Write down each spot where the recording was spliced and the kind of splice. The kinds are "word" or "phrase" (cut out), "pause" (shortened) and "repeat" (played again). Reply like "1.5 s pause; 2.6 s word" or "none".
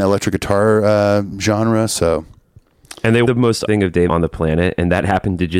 3.2 s word; 3.7 s word; 4.1 s word